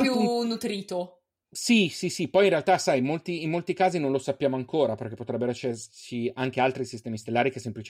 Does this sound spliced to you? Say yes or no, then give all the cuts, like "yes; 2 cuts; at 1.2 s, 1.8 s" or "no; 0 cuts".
no; 0 cuts